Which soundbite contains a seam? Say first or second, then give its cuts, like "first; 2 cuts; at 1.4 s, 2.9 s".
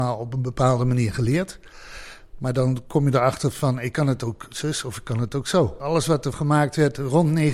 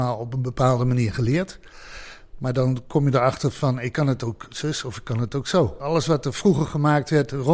first; 1 cut; at 6.3 s